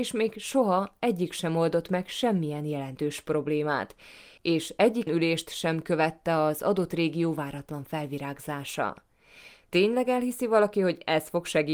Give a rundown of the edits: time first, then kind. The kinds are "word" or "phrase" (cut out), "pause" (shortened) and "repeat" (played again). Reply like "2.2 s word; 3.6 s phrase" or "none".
5.1 s word

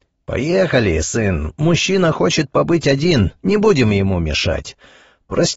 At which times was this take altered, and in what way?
none

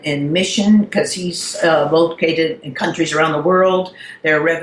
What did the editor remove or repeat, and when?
none

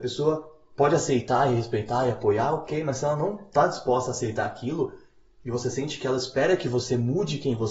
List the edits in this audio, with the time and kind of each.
none

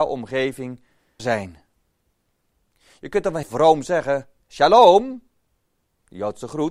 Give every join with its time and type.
1.2 s word; 3.4 s word; 4.4 s pause

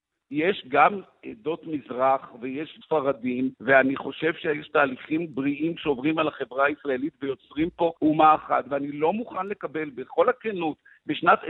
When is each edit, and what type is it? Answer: 2.8 s word; 3.5 s pause; 8.0 s pause

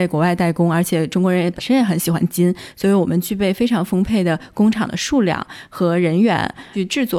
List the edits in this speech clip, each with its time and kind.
none

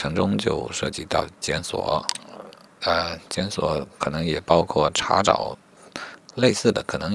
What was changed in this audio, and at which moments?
none

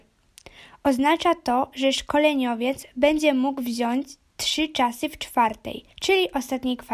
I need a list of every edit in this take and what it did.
5.9 s pause

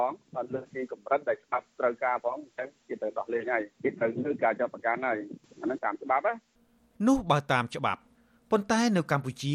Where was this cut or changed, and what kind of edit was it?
3.7 s pause

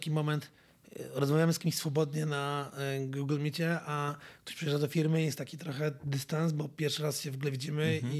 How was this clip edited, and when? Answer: none

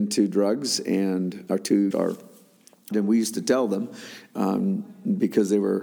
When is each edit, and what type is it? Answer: 1.5 s word; 1.9 s word; 2.9 s word

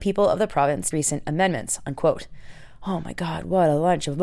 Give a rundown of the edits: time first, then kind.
0.9 s phrase

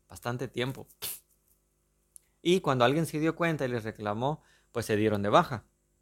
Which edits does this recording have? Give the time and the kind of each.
none

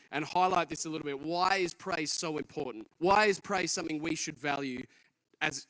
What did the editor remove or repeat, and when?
2.9 s pause

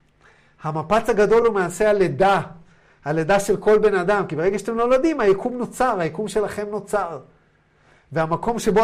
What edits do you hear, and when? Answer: none

